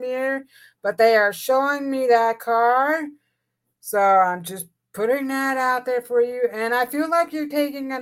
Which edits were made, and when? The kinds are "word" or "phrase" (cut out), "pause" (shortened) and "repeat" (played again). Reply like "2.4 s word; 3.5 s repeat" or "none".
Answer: none